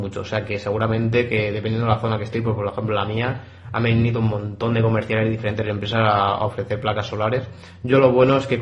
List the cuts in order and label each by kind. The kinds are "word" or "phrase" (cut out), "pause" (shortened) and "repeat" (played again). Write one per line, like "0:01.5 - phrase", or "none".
none